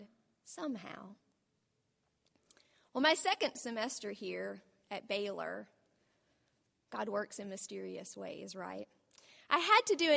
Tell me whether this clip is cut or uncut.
uncut